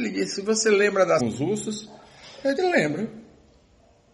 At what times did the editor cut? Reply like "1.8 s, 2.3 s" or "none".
1.2 s, 2.6 s